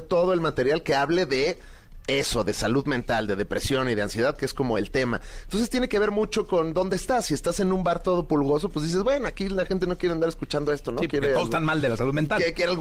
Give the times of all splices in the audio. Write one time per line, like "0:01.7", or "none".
none